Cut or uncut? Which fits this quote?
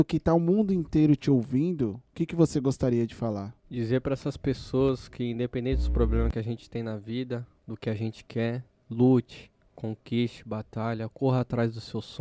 cut